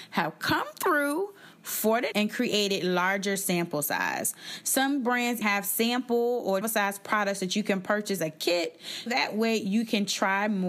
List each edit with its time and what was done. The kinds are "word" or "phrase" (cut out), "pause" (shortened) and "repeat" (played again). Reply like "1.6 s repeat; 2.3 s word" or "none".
2.1 s word; 5.4 s word; 6.6 s word; 8.2 s word; 9.1 s word